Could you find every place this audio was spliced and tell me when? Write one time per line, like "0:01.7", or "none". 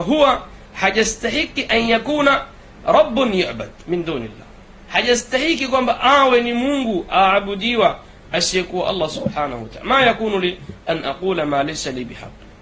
none

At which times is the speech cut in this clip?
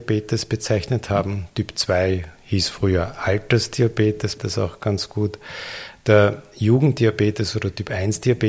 0:04.4

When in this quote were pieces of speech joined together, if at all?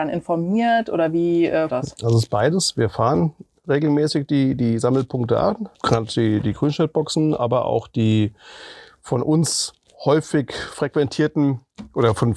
0:01.7
0:05.7
0:09.9

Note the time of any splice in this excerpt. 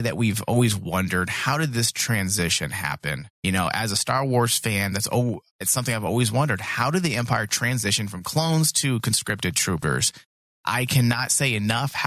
0:03.3
0:10.3

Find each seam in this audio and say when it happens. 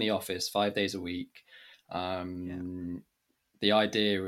none

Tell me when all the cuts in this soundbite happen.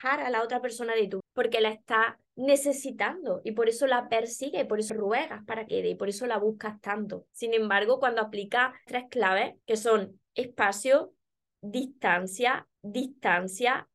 0:01.2
0:02.3
0:04.9
0:05.7
0:07.3
0:08.9
0:09.6
0:12.8

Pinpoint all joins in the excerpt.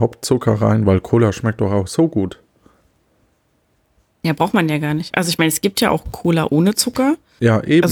none

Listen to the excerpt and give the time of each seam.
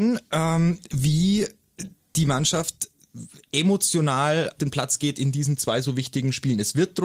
0:04.6

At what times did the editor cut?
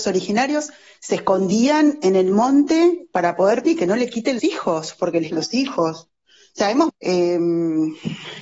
0:03.6
0:04.4
0:05.3
0:06.9

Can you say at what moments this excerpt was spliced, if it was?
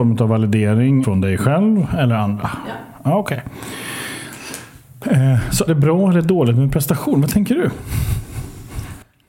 0:01.0
0:05.7

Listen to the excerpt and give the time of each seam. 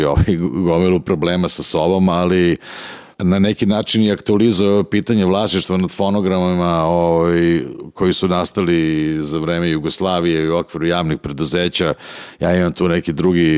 0:03.1

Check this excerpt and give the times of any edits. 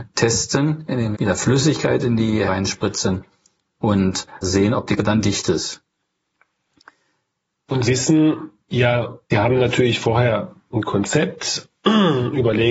0:01.1
0:02.5
0:04.4
0:05.0
0:07.8
0:09.3

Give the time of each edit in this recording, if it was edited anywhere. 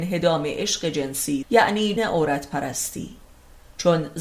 0:01.4
0:02.0

